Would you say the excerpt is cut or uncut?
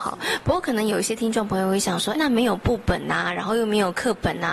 cut